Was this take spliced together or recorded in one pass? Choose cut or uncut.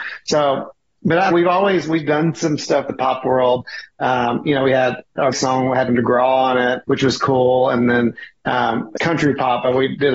cut